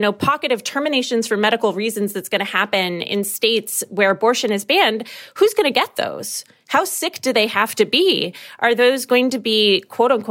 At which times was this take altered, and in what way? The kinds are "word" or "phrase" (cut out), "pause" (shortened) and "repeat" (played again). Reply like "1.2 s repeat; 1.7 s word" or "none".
none